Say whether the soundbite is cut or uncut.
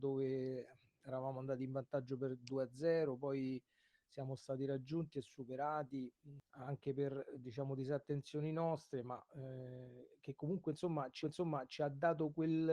cut